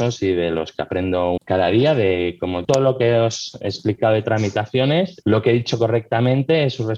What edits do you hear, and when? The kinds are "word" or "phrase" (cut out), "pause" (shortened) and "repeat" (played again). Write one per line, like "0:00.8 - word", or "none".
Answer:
0:01.4 - word
0:02.6 - word
0:05.2 - word